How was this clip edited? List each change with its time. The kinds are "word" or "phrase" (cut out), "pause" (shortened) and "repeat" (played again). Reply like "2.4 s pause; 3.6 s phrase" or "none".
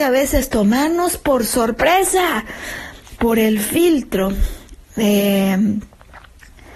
none

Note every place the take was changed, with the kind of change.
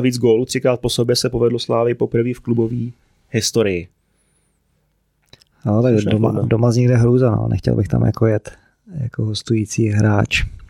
none

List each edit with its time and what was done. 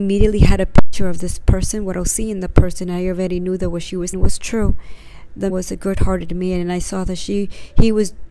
4.1 s word; 5.5 s word

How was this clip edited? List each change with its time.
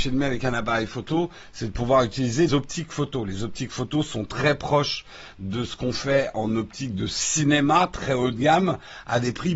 2.5 s word

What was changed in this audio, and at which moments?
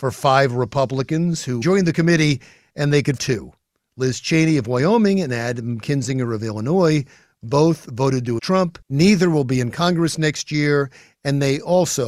1.6 s phrase; 3.2 s word; 8.4 s word; 8.8 s pause

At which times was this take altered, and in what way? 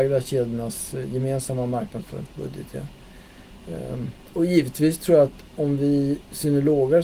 none

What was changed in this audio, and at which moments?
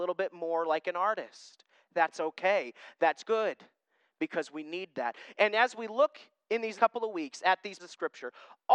6.8 s word; 7.8 s word

